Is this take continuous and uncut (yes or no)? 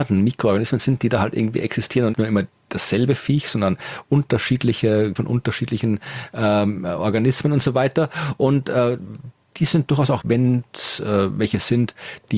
no